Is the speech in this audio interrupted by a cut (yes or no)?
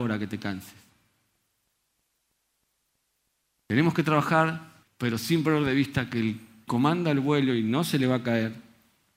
yes